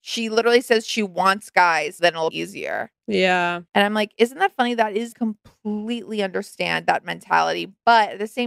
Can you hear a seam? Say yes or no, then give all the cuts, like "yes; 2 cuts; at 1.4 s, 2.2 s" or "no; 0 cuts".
yes; 4 cuts; at 2.0 s, 2.3 s, 3.7 s, 5.1 s